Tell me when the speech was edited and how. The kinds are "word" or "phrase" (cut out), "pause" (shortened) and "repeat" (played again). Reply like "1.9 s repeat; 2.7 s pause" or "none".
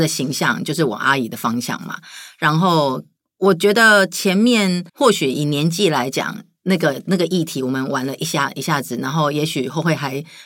3.2 s pause; 4.9 s pause